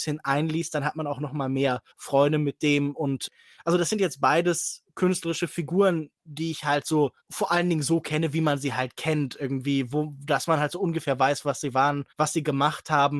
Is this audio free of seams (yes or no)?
no